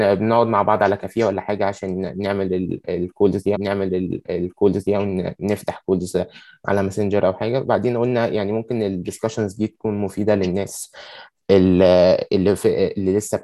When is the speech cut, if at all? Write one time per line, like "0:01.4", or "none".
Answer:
0:03.5